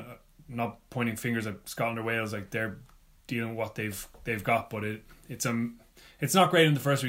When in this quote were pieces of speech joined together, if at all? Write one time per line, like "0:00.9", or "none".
none